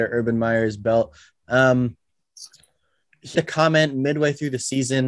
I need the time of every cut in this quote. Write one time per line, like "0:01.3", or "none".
0:03.3